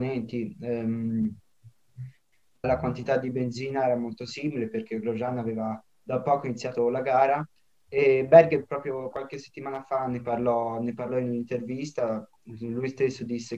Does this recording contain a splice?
yes; 2 cuts; at 2.6 s, 9.1 s

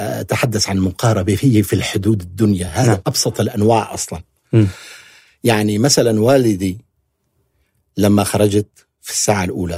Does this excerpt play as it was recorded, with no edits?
yes; 0 cuts

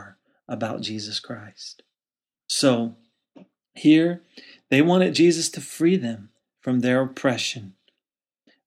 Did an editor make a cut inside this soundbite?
no; 0 cuts

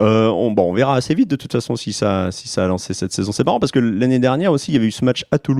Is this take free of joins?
yes; 0 cuts

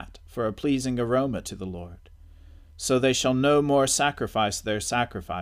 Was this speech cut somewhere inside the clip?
no; 0 cuts

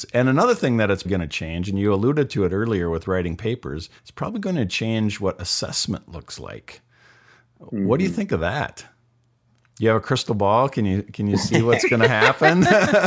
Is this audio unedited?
no; 2 cuts; at 1.0 s, 4.0 s

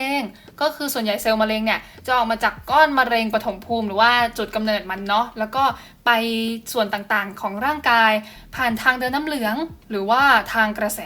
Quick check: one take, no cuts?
yes; 0 cuts

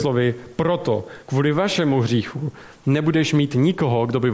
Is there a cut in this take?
no; 0 cuts

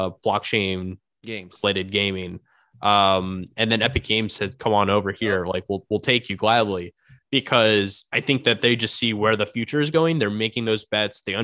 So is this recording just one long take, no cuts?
yes; 0 cuts

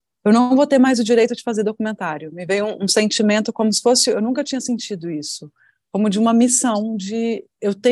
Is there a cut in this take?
no; 0 cuts

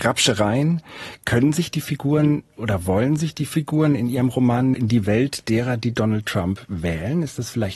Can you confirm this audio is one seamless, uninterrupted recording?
no; 1 cut; at 4.7 s

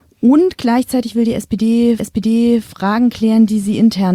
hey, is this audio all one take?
no; 1 cut; at 2.0 s

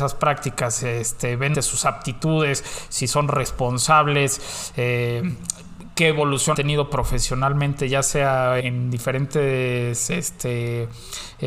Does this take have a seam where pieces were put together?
yes; 3 cuts; at 1.5 s, 6.5 s, 8.6 s

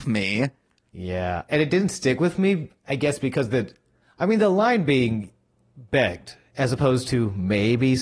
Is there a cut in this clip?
no; 0 cuts

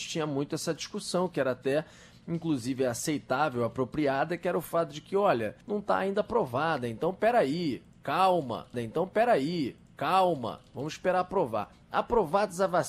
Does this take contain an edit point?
yes; 2 cuts; at 5.6 s, 8.7 s

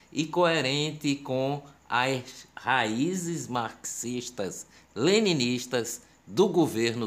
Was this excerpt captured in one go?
yes; 0 cuts

